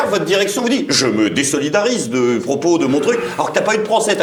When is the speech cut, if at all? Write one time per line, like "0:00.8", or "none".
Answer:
none